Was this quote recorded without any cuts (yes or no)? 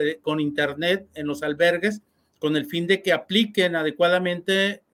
yes